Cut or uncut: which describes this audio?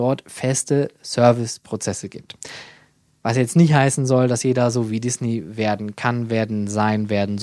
uncut